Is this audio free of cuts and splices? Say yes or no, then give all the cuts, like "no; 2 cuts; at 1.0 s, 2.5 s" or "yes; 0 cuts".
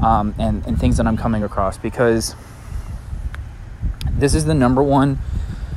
yes; 0 cuts